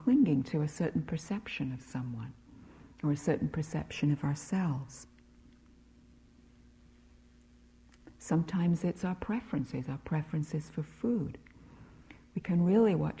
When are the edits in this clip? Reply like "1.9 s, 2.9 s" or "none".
none